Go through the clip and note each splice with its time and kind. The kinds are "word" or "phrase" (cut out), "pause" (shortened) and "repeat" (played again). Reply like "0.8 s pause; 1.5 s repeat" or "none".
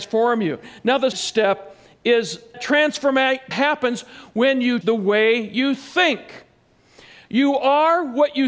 1.1 s word; 2.5 s word; 3.5 s word; 4.8 s word